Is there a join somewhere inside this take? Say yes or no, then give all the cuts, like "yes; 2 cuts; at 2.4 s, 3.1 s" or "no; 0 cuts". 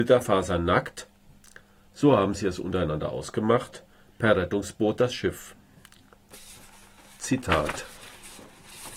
no; 0 cuts